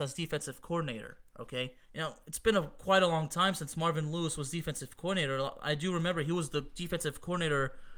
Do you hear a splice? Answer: yes; 1 cut; at 1.8 s

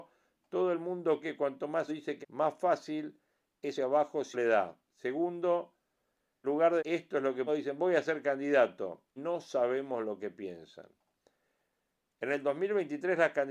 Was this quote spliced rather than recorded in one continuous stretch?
yes; 9 cuts; at 1.2 s, 1.9 s, 2.2 s, 3.8 s, 4.3 s, 6.4 s, 6.8 s, 7.5 s, 9.2 s

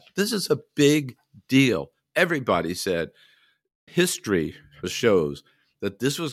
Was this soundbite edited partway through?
yes; 2 cuts; at 3.9 s, 4.8 s

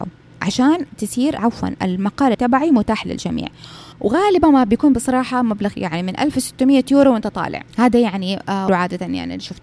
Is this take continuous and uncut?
no; 6 cuts; at 1.4 s, 2.3 s, 3.9 s, 5.7 s, 7.7 s, 8.7 s

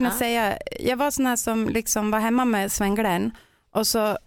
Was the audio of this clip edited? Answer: no; 0 cuts

